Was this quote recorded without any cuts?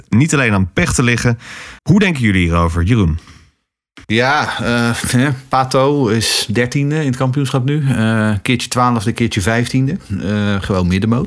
no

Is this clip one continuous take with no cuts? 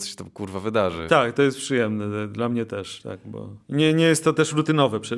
no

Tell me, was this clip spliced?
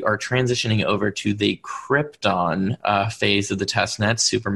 no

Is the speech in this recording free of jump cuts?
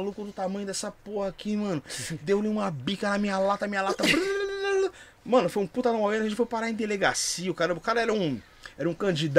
yes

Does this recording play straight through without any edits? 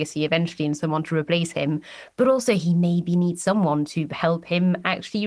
yes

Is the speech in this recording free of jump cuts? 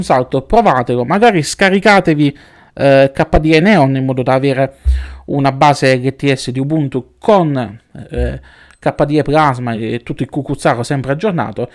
yes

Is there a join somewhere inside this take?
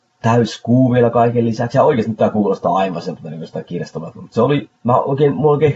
no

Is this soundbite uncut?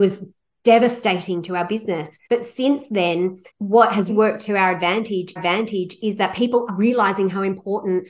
no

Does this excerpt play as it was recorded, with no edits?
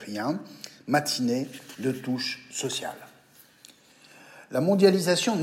yes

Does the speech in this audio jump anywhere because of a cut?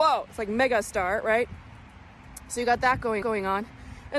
yes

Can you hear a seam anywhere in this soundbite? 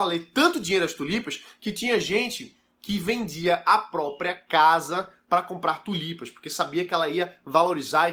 no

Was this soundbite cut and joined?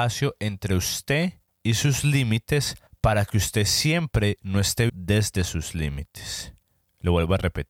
yes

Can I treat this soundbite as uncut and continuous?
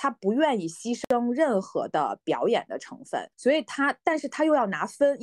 no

